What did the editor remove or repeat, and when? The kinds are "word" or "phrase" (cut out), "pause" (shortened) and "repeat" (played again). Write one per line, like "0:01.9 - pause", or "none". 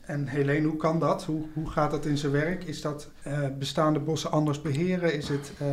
none